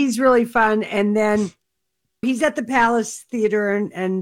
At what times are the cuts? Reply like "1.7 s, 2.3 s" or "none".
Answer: 2.2 s